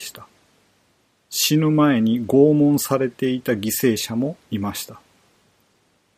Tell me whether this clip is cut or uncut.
uncut